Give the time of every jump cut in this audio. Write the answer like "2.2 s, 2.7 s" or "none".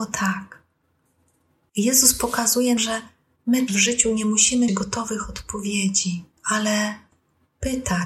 2.8 s, 3.7 s, 4.7 s, 6.3 s